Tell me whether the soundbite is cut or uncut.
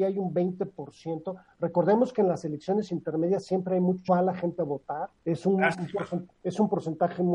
cut